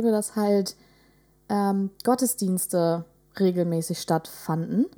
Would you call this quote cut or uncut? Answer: uncut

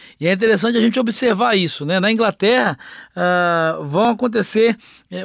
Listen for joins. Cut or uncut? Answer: uncut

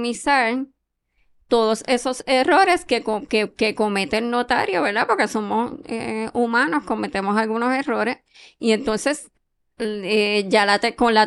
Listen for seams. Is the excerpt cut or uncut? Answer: uncut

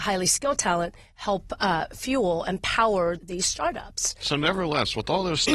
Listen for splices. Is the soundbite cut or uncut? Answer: cut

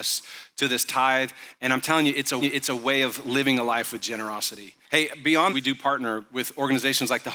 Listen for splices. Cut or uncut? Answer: cut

